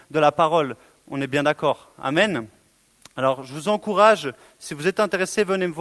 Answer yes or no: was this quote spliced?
no